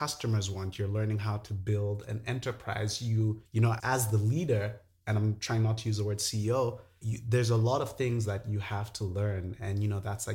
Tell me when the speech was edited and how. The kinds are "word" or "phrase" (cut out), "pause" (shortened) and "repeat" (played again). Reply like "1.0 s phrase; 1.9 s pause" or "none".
3.5 s pause; 3.8 s word; 7.0 s word